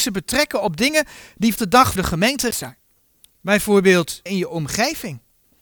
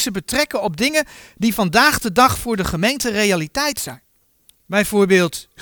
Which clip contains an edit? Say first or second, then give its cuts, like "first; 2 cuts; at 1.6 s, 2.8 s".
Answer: first; 4 cuts; at 1.6 s, 2.0 s, 2.5 s, 4.3 s